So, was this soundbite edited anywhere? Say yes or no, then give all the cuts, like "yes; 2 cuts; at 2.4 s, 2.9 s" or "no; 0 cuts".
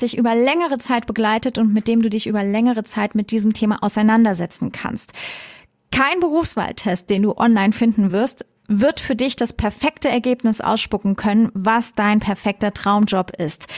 no; 0 cuts